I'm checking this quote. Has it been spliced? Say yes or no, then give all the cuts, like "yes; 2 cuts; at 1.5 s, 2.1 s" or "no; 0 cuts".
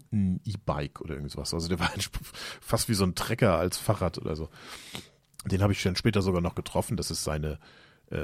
no; 0 cuts